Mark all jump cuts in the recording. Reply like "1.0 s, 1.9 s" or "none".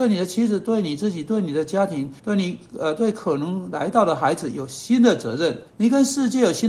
2.2 s, 5.7 s